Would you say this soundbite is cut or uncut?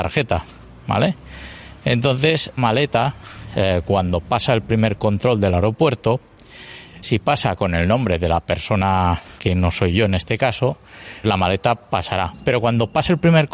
cut